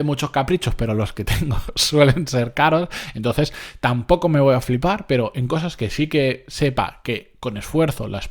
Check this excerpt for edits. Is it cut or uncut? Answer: uncut